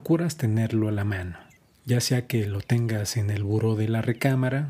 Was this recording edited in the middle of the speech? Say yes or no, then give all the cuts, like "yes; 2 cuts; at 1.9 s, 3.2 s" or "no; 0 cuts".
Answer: yes; 1 cut; at 1.6 s